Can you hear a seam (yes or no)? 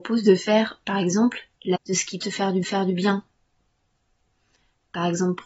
yes